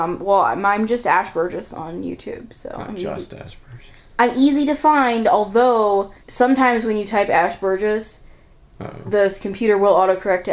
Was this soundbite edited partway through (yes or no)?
yes